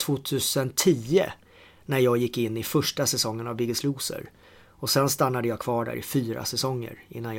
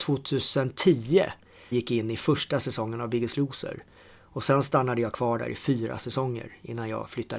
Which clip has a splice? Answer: second; 1 cut; at 1.7 s

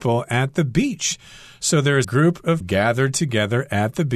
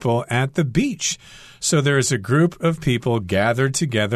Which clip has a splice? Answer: first; 2 cuts; at 2.0 s, 2.6 s

